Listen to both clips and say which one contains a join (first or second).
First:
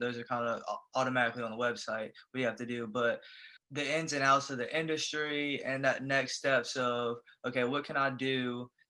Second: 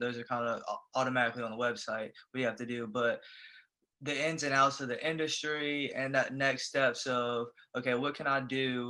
first